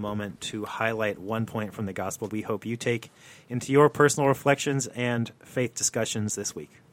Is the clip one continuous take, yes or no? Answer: no